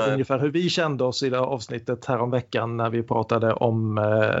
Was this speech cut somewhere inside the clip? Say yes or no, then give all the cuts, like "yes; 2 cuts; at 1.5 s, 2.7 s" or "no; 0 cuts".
no; 0 cuts